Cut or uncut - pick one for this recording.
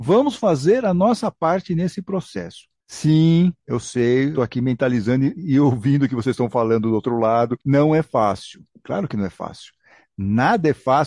cut